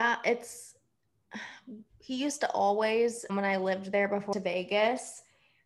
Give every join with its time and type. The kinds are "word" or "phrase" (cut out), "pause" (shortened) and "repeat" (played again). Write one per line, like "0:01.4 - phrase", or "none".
0:03.3 - word
0:04.3 - phrase